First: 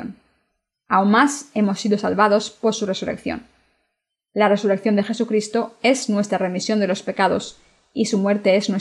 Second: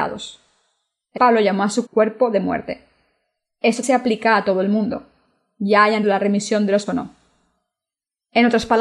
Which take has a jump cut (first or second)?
second